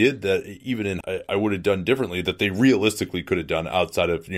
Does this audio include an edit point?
yes; 1 cut; at 1.0 s

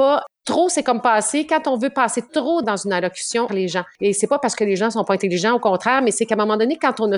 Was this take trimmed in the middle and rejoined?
yes; 2 cuts; at 2.6 s, 3.5 s

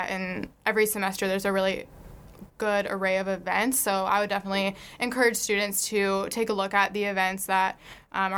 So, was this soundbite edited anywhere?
no; 0 cuts

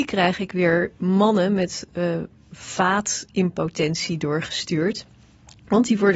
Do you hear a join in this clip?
no; 0 cuts

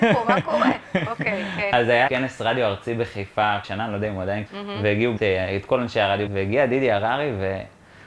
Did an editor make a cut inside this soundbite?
yes; 5 cuts; at 2.1 s, 3.6 s, 4.5 s, 5.2 s, 6.3 s

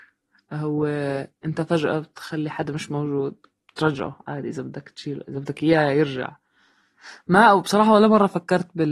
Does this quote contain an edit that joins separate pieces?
no; 0 cuts

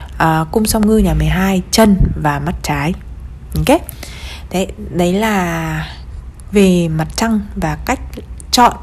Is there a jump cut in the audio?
no; 0 cuts

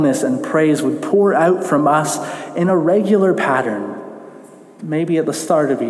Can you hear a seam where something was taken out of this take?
no; 0 cuts

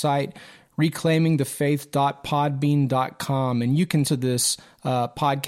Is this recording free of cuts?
no; 1 cut; at 4.0 s

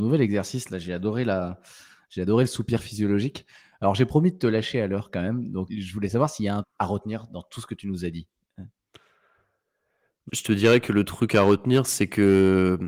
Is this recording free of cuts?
no; 3 cuts; at 5.7 s, 6.6 s, 10.3 s

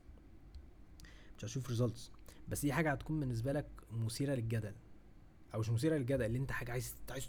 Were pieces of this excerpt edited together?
no; 0 cuts

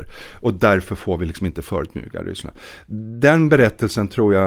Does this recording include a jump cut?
no; 0 cuts

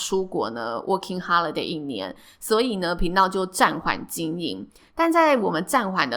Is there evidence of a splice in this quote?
no; 0 cuts

